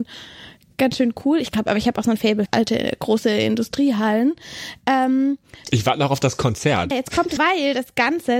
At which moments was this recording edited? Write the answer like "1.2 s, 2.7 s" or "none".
2.5 s, 5.6 s, 6.9 s, 7.4 s